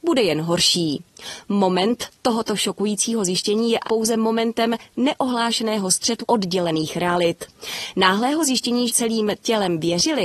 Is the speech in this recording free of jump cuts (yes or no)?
no